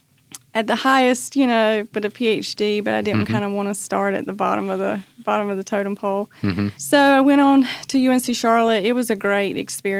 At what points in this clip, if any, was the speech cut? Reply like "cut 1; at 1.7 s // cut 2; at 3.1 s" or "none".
cut 1; at 6.8 s